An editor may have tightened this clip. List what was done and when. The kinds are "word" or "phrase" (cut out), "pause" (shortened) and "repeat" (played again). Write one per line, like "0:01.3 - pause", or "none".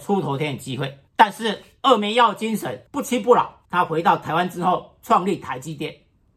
0:01.1 - pause
0:02.9 - pause
0:03.6 - pause

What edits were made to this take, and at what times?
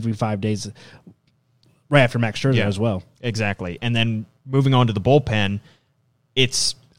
none

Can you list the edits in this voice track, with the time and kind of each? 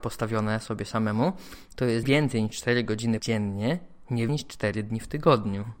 0:02.0 - word
0:03.2 - word
0:04.3 - word

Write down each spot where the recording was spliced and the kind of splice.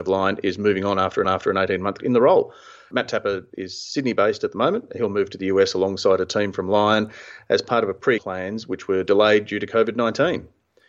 0:01.2 - repeat
0:02.0 - word
0:08.2 - word

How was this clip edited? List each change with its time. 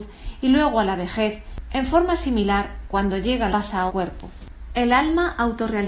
0:03.5 - phrase
0:03.9 - word

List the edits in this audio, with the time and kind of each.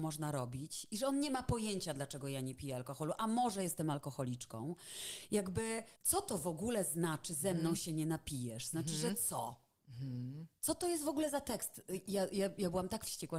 0:06.0 - pause

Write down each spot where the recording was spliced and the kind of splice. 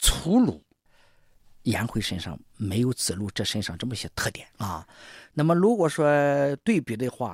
0:04.1 - pause
0:04.5 - pause

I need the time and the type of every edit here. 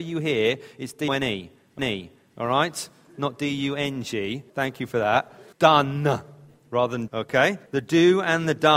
0:01.1 - word
0:01.8 - repeat
0:04.5 - pause
0:05.5 - pause
0:07.1 - word
0:07.7 - pause

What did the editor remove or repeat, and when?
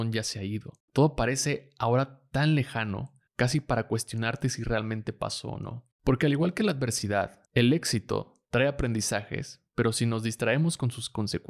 0:03.3 - pause
0:07.4 - pause

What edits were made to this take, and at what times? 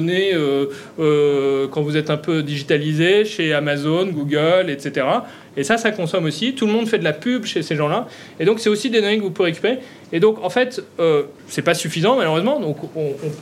0:11.4 - pause

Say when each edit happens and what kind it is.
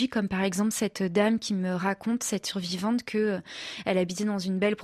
none

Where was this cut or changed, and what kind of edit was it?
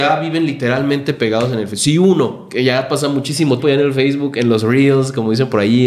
0:03.6 - word

